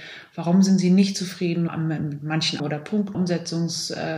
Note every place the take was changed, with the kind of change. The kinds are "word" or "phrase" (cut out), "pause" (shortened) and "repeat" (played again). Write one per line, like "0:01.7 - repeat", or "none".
0:01.7 - word
0:02.6 - word
0:03.1 - word